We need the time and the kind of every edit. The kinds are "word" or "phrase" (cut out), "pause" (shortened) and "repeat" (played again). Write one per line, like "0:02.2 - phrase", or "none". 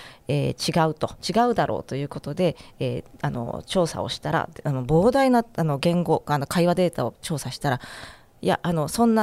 0:01.2 - pause
0:03.1 - pause